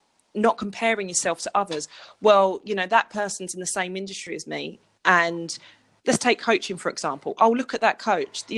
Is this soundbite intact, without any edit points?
yes; 0 cuts

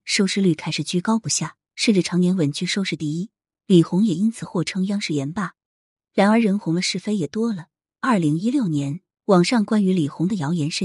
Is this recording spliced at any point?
yes; 1 cut; at 1.7 s

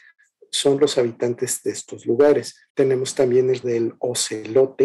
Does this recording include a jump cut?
yes; 3 cuts; at 1.6 s, 2.7 s, 3.6 s

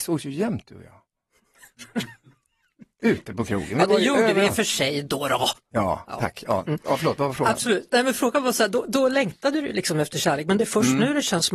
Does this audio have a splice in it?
no; 0 cuts

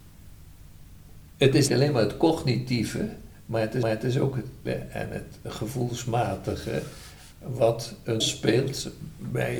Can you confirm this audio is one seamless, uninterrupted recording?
no; 5 cuts; at 1.3 s, 1.7 s, 3.8 s, 4.7 s, 8.2 s

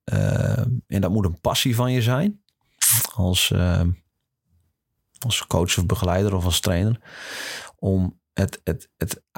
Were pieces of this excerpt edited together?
no; 0 cuts

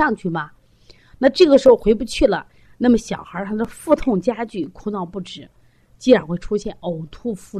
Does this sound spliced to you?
no; 0 cuts

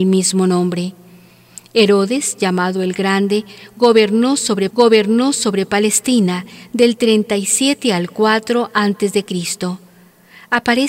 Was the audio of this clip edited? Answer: yes; 1 cut; at 4.7 s

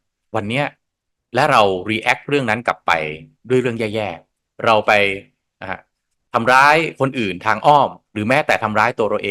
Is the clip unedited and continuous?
yes; 0 cuts

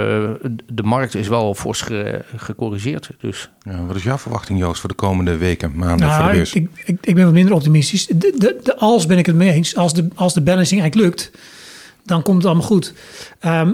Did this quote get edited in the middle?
no; 0 cuts

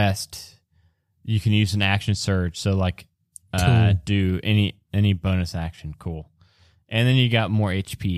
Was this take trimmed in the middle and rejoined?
no; 0 cuts

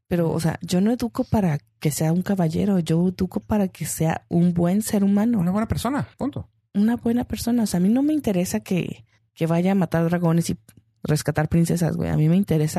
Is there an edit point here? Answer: yes; 2 cuts; at 6.1 s, 9.2 s

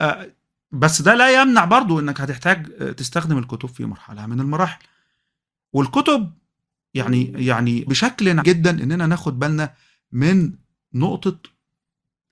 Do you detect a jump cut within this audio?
yes; 2 cuts; at 7.9 s, 8.4 s

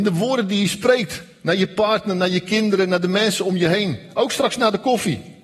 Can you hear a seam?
no; 0 cuts

